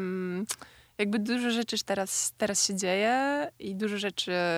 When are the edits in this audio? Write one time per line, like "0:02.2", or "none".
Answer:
none